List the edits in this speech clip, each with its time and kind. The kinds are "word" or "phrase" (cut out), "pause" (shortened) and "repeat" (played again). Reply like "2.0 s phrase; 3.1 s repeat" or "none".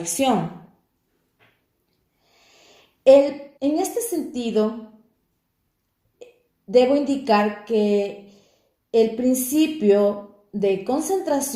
3.6 s pause